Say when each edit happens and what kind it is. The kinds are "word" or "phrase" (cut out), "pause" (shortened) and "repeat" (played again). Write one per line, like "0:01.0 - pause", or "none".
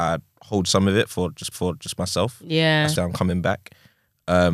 0:01.5 - repeat
0:03.0 - phrase